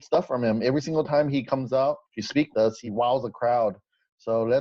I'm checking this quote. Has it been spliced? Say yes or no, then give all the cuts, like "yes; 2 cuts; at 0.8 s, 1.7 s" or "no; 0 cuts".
yes; 2 cuts; at 2.5 s, 2.9 s